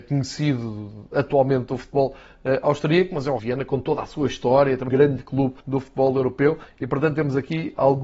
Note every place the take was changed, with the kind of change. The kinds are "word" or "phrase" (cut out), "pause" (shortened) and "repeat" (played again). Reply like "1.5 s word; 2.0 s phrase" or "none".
3.4 s word; 4.9 s word; 5.6 s pause